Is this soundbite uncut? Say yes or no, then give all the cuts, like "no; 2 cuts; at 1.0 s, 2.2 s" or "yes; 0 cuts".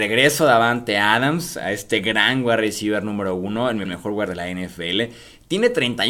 no; 2 cuts; at 3.8 s, 4.3 s